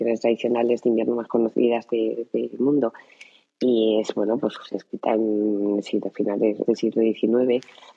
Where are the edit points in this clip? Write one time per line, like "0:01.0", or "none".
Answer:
0:06.7